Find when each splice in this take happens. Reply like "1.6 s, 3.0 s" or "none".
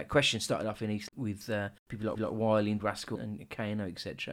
1.1 s, 1.8 s, 2.1 s, 2.8 s, 3.1 s